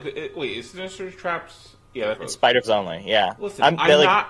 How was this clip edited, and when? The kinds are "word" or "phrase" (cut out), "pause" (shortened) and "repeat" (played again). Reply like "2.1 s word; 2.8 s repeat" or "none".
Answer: 2.1 s phrase; 2.6 s word